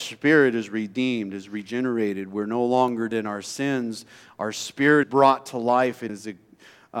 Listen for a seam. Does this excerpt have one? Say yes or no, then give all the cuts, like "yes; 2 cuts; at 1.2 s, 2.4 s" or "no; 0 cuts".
yes; 3 cuts; at 3.1 s, 5.0 s, 6.1 s